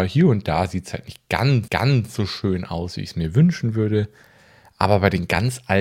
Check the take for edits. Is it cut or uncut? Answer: cut